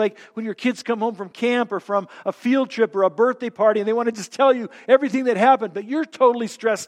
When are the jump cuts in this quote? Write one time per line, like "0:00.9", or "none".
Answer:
none